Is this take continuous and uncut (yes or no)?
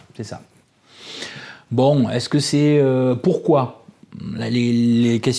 yes